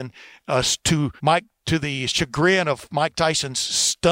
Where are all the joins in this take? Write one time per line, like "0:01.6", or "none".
0:01.2